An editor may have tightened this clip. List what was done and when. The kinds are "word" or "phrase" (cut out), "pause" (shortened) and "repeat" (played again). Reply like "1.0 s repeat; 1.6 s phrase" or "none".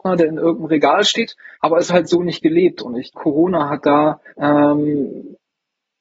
1.5 s pause; 1.9 s word; 3.1 s word; 4.3 s pause